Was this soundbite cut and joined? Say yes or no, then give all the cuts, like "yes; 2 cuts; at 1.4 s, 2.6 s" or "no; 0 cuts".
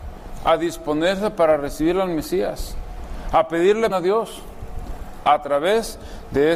yes; 1 cut; at 3.9 s